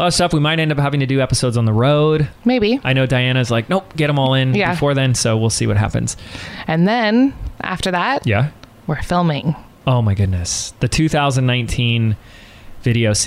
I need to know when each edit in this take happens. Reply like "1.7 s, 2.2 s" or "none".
none